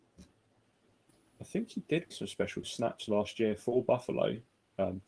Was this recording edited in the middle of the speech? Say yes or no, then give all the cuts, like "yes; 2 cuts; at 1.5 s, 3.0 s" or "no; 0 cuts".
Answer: yes; 2 cuts; at 2.1 s, 2.6 s